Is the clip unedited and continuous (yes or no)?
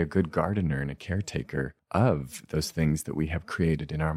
no